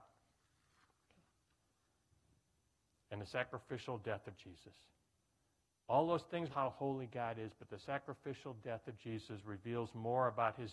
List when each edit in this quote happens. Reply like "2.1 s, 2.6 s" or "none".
6.5 s

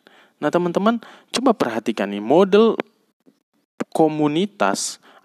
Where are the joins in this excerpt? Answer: none

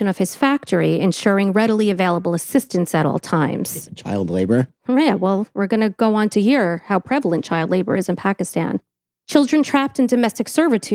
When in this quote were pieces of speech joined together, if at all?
none

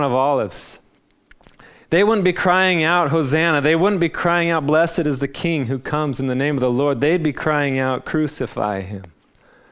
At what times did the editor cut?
none

